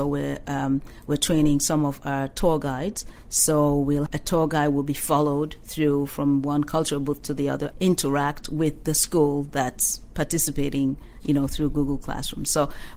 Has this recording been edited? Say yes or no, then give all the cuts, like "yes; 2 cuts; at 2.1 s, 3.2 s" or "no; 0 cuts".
yes; 2 cuts; at 4.1 s, 7.7 s